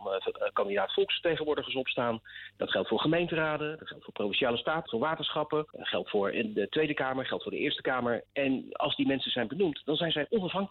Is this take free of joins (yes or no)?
no